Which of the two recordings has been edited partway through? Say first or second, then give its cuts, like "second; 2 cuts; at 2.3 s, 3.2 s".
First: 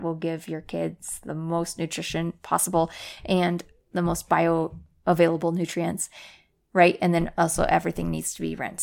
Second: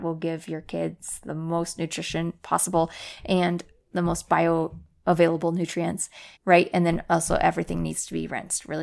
second; 1 cut; at 6.4 s